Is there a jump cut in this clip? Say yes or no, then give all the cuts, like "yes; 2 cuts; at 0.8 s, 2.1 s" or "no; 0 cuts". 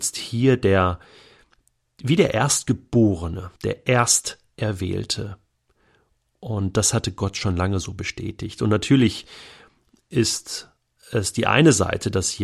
yes; 1 cut; at 3.6 s